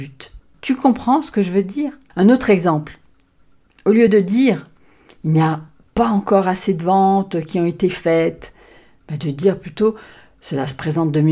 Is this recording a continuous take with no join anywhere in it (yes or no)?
yes